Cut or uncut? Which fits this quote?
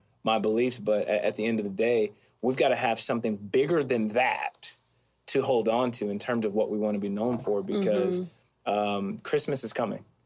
uncut